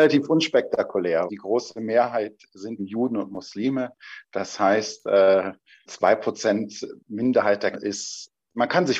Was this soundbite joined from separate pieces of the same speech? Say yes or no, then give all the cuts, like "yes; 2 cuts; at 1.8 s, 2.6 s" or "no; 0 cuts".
yes; 4 cuts; at 1.3 s, 2.8 s, 5.9 s, 7.7 s